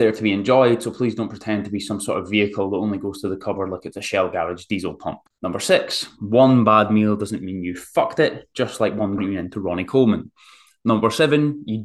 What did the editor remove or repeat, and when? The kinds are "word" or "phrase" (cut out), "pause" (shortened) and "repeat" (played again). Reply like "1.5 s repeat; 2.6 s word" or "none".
5.3 s pause; 9.2 s phrase